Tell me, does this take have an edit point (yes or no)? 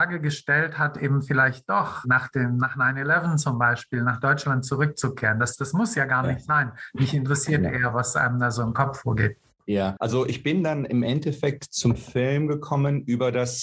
yes